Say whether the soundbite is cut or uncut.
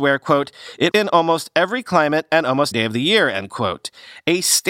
cut